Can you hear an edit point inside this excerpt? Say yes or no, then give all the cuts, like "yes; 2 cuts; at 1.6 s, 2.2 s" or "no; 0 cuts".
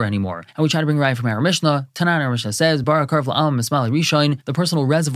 no; 0 cuts